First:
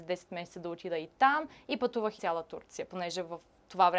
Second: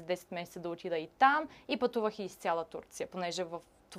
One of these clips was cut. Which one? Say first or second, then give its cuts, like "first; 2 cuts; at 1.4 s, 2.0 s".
first; 1 cut; at 2.2 s